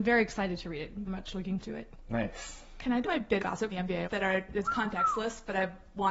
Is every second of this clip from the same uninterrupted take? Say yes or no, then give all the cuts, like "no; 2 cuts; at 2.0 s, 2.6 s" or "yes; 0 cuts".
no; 7 cuts; at 1.1 s, 1.6 s, 3.0 s, 3.4 s, 3.7 s, 4.0 s, 4.6 s